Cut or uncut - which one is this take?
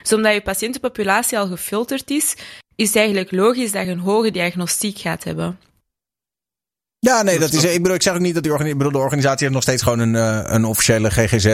uncut